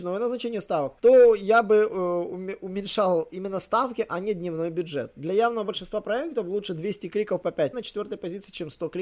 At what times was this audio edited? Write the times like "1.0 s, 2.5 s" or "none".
1.0 s, 7.7 s

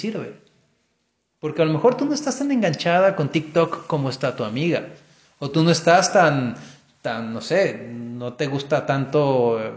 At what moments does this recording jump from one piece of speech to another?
none

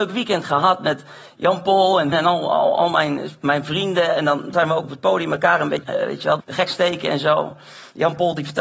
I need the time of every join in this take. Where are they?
2.1 s, 2.7 s, 4.5 s, 4.8 s, 5.8 s, 6.4 s

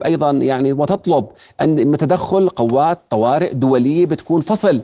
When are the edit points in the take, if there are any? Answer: none

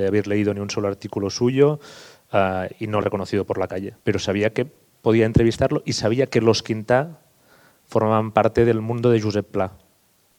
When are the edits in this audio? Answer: 3.0 s, 4.0 s

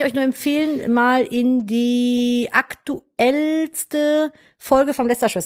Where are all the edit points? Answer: none

